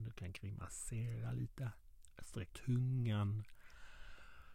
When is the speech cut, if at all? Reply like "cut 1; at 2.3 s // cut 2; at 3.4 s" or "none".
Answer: cut 1; at 2.5 s